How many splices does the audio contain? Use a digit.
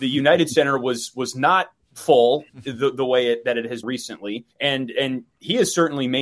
2